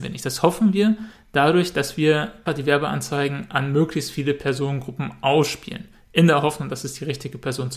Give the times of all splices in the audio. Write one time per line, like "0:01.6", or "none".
0:02.5